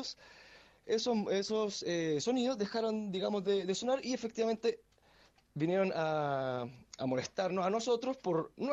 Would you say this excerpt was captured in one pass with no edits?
yes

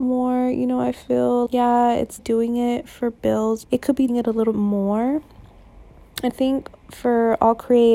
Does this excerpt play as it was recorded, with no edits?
no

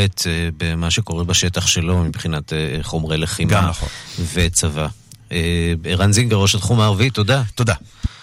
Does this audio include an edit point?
no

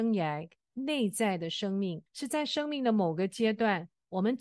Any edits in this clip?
yes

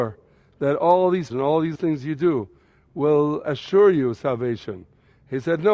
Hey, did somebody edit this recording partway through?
yes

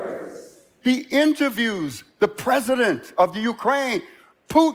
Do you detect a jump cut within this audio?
no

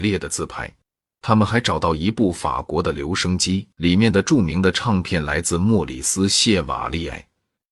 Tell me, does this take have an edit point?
yes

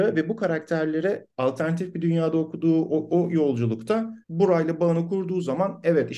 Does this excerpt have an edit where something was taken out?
yes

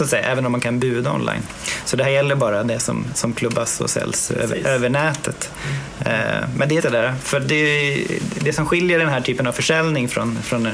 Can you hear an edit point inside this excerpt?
yes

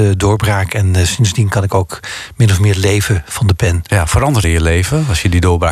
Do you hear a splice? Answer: yes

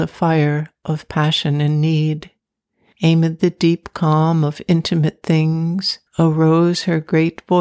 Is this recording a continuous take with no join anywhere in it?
no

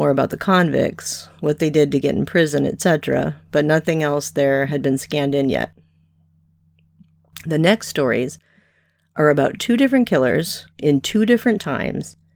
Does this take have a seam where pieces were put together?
yes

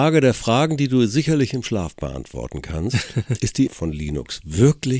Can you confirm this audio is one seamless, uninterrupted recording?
no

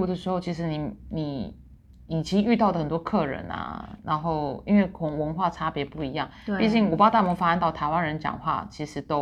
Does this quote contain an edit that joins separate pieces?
no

